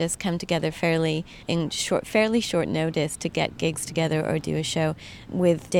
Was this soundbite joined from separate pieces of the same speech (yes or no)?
yes